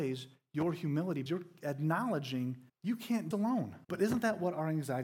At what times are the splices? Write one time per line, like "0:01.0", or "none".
0:01.3
0:02.7
0:03.3
0:03.8